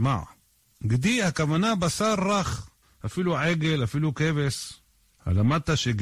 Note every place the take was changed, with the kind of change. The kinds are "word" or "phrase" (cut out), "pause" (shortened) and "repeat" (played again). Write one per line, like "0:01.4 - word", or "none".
0:02.8 - pause